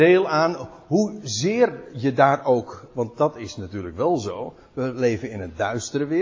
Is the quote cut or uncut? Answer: uncut